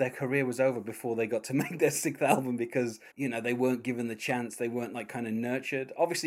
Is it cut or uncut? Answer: cut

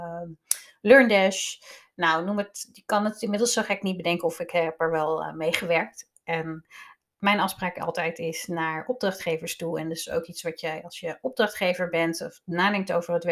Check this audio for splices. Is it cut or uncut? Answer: uncut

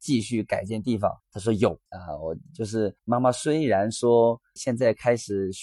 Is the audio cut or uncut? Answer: cut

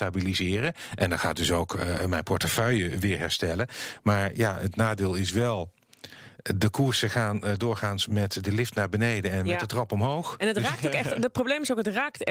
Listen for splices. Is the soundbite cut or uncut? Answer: uncut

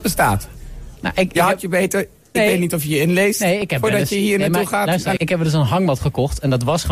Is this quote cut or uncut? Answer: cut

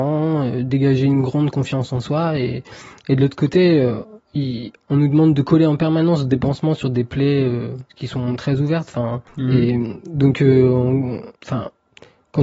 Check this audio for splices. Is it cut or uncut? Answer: cut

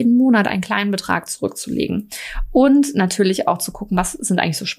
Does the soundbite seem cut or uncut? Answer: uncut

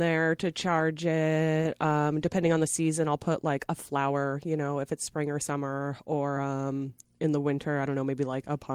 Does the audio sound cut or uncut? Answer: uncut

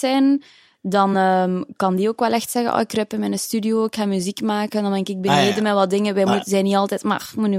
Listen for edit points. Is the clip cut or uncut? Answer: uncut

